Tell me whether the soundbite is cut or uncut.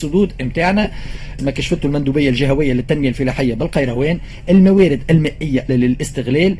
cut